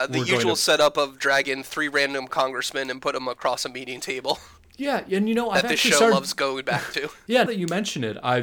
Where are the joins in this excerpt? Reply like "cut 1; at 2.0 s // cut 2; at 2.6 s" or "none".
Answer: cut 1; at 7.5 s